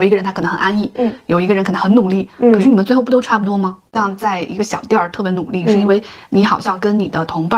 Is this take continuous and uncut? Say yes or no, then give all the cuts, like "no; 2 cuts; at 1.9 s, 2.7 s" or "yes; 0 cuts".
no; 1 cut; at 3.9 s